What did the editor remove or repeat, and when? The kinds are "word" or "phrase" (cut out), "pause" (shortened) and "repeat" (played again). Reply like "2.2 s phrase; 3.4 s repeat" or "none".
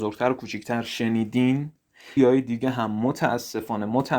2.2 s word